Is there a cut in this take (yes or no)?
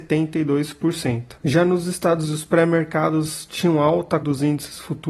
yes